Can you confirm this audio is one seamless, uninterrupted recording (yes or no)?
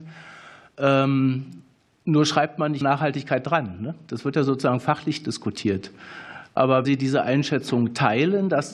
no